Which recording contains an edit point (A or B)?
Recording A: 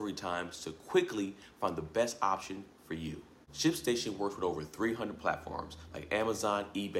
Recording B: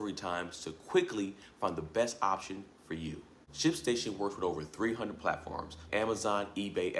B